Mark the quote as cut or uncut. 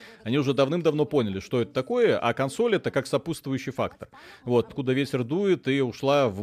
cut